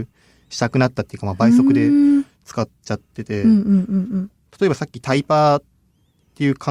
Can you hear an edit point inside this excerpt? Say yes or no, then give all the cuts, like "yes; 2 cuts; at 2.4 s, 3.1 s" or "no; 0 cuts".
no; 0 cuts